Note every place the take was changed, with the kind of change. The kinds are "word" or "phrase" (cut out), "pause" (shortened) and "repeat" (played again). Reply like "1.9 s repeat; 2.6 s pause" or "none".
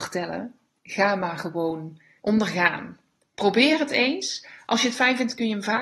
2.2 s word